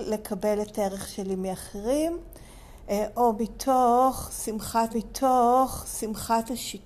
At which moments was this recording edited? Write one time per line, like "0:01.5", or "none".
0:04.9